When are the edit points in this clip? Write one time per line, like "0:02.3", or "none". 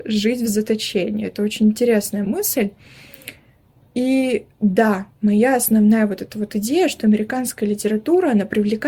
0:04.5